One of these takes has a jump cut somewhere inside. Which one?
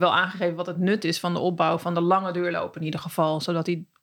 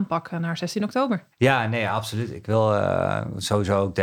second; 1 cut; at 1.3 s

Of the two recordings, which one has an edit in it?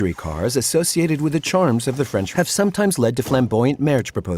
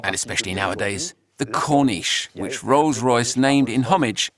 first; 1 cut; at 2.3 s

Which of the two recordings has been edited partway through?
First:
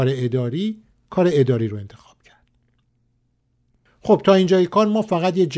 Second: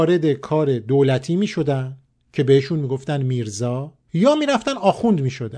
second; 1 cut; at 4.0 s

